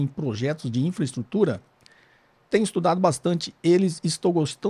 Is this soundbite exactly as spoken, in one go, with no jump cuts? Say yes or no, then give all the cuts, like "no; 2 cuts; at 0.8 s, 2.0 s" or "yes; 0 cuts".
yes; 0 cuts